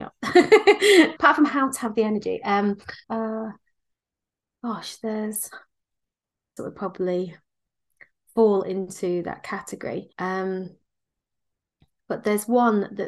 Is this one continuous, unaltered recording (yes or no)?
no